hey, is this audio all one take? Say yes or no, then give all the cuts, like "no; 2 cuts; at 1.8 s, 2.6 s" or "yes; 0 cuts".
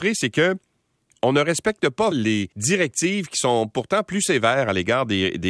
no; 2 cuts; at 2.1 s, 2.5 s